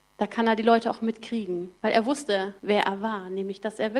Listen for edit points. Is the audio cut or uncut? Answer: cut